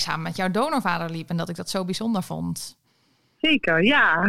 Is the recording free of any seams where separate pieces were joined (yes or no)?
yes